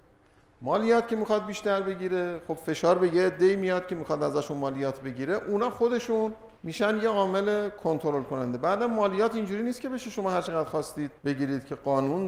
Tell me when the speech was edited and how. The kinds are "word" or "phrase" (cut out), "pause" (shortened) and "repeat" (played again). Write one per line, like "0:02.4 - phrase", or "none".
0:06.6 - pause
0:11.2 - pause